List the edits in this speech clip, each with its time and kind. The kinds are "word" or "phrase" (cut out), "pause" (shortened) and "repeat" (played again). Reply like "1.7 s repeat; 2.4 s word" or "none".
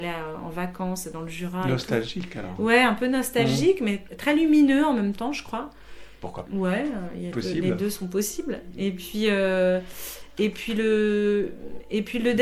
6.5 s word; 7.3 s word